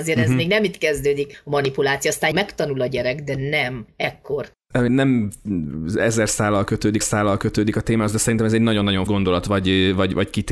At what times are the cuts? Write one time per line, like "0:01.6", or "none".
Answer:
0:02.3
0:04.9
0:07.0
0:09.1